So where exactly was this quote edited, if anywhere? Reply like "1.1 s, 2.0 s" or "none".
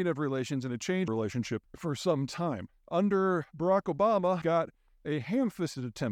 1.1 s, 1.7 s, 2.7 s, 4.4 s